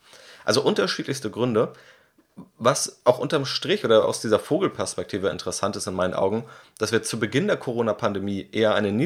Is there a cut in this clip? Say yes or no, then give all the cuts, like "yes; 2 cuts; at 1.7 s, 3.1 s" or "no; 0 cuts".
no; 0 cuts